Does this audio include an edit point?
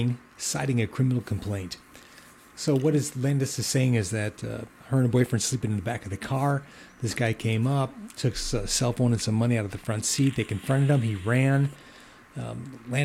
no; 0 cuts

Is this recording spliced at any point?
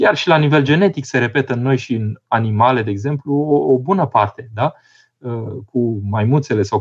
no; 0 cuts

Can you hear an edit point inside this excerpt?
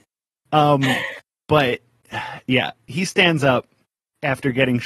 no; 0 cuts

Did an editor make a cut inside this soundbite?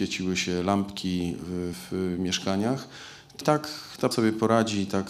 yes; 3 cuts; at 1.7 s, 3.4 s, 4.1 s

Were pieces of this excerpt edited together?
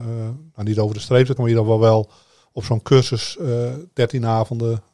yes; 1 cut; at 1.4 s

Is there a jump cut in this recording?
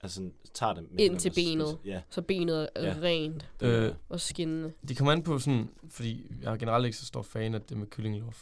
no; 0 cuts

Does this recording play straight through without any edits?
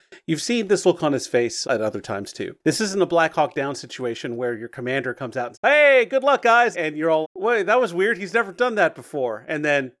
no; 4 cuts; at 1.6 s, 5.5 s, 6.7 s, 7.2 s

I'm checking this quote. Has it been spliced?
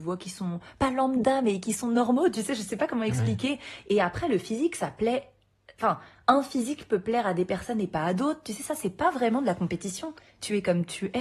no; 0 cuts

